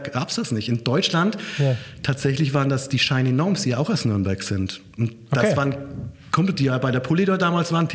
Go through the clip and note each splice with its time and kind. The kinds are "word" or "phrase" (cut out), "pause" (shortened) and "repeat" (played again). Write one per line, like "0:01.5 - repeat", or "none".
none